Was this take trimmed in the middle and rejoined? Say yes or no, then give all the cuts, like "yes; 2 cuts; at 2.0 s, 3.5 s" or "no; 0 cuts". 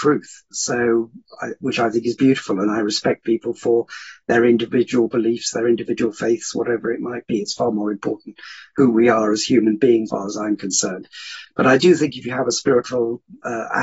yes; 1 cut; at 10.1 s